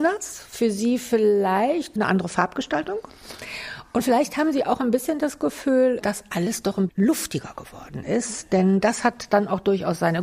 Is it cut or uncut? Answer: cut